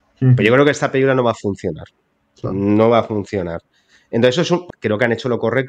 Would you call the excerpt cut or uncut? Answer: cut